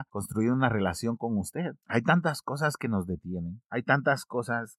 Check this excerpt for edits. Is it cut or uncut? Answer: uncut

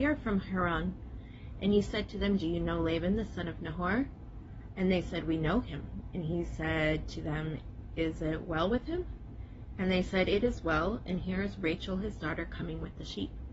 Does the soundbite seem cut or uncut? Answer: uncut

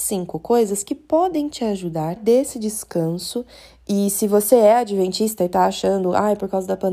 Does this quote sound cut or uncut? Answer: cut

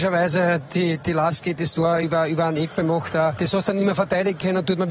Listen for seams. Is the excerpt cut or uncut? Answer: uncut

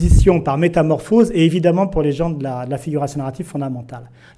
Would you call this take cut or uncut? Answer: uncut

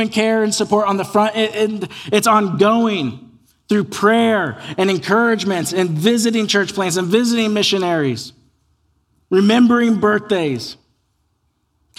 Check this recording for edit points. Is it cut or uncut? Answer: uncut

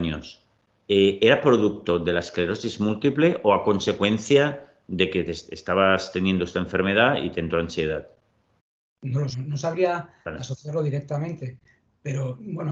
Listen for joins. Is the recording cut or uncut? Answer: cut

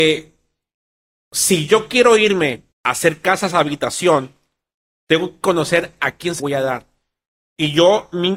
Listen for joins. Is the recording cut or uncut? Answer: cut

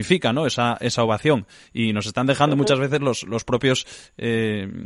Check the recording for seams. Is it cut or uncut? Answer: uncut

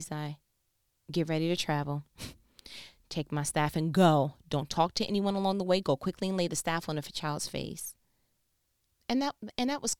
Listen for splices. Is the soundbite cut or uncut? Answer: uncut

